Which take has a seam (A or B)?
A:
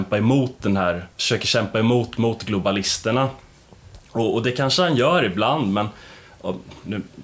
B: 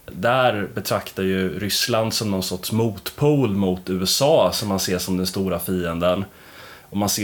A